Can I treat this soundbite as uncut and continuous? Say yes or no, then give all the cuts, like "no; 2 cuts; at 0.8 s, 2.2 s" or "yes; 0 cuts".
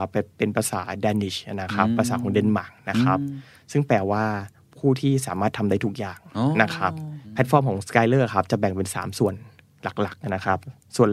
yes; 0 cuts